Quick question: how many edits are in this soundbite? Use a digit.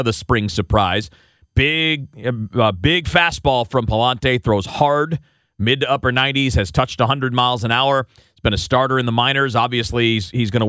0